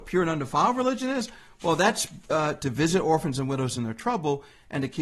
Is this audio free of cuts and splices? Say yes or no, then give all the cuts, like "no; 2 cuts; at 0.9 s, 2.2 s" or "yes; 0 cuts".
yes; 0 cuts